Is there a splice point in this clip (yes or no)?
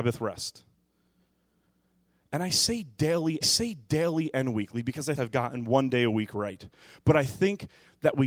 yes